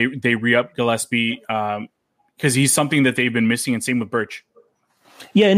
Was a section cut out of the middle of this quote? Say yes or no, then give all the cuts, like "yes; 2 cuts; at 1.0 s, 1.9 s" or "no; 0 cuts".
no; 0 cuts